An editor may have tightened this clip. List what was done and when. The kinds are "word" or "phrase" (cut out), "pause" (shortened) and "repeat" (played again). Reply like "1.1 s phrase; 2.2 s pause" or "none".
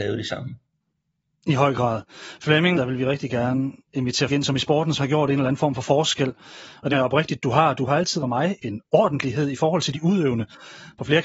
2.8 s phrase; 4.3 s word; 5.0 s word; 6.9 s word; 8.2 s word; 8.6 s word